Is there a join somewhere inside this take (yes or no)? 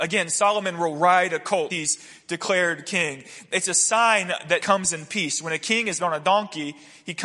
yes